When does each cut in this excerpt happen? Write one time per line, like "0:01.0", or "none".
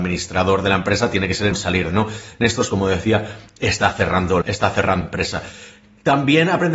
0:01.5
0:01.9
0:02.7
0:04.4
0:05.0